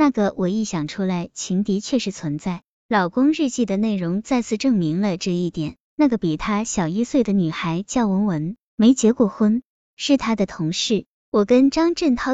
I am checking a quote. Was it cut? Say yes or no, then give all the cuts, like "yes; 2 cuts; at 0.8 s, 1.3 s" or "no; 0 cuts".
no; 0 cuts